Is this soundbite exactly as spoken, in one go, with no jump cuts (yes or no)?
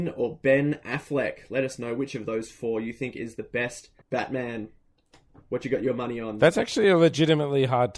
no